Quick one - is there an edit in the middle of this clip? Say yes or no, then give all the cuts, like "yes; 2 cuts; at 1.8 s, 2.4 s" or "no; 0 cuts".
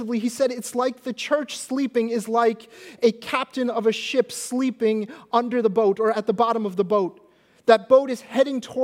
no; 0 cuts